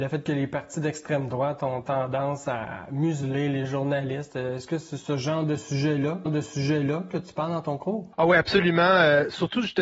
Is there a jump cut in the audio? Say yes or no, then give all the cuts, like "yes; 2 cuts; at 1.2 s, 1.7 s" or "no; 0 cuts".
yes; 2 cuts; at 6.3 s, 8.1 s